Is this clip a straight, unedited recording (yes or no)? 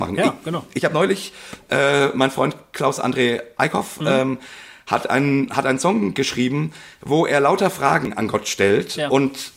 yes